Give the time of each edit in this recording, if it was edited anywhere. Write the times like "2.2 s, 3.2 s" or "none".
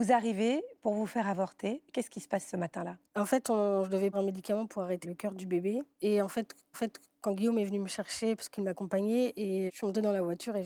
3.1 s, 4.1 s, 5.0 s, 5.9 s, 6.7 s, 9.7 s